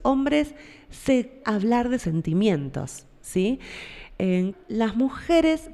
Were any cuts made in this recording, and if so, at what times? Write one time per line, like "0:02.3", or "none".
0:01.4
0:02.0
0:04.5